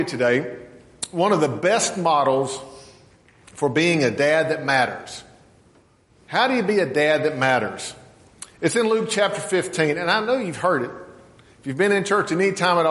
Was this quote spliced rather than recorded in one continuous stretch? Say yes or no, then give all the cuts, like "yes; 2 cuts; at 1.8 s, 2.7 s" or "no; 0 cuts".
no; 0 cuts